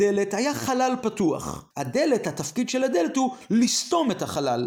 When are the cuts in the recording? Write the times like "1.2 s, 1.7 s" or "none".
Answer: 1.7 s